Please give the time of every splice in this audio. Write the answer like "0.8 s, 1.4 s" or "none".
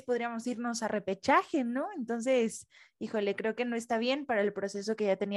none